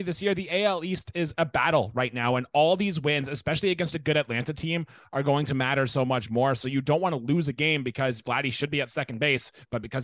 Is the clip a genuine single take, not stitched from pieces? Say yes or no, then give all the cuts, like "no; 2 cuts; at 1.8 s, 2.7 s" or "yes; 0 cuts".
yes; 0 cuts